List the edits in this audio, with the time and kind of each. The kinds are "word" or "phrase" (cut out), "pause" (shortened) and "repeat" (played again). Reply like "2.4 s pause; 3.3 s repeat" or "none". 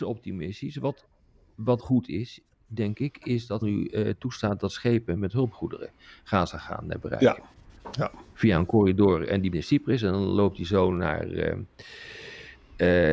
1.8 s word; 3.6 s word; 9.5 s word